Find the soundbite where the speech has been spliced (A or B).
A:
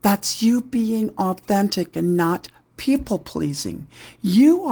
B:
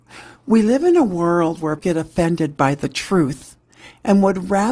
B